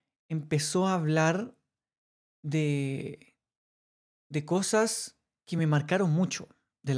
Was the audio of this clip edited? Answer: no; 0 cuts

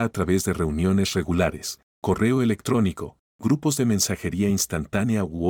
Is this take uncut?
yes; 0 cuts

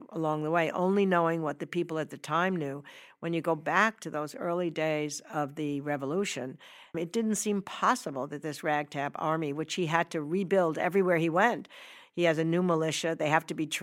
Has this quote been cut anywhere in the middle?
yes; 1 cut; at 6.9 s

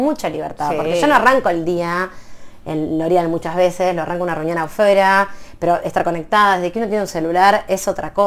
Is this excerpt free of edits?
yes; 0 cuts

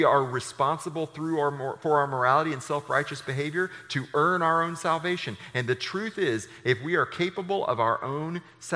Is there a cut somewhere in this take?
no; 0 cuts

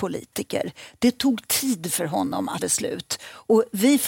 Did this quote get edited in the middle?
yes; 1 cut; at 2.6 s

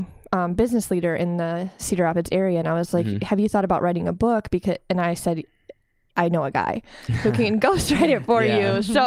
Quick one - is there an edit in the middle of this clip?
no; 0 cuts

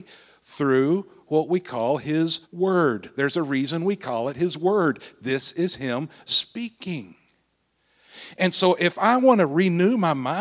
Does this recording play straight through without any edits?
no; 1 cut; at 2.4 s

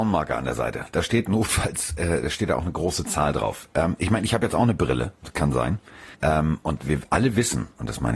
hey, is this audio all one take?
no; 2 cuts; at 5.1 s, 6.1 s

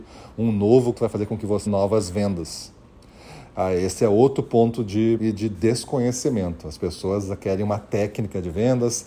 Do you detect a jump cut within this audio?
yes; 3 cuts; at 0.9 s, 1.7 s, 5.2 s

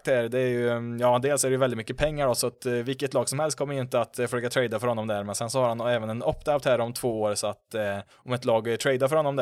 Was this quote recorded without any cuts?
no; 1 cut; at 8.1 s

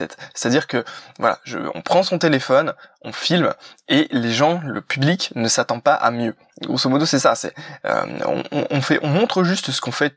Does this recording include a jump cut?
no; 0 cuts

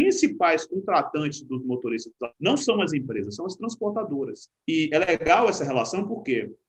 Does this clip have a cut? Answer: yes; 1 cut; at 2.3 s

